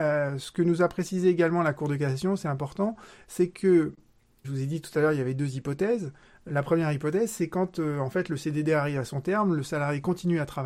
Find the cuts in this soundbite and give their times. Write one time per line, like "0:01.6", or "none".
0:04.4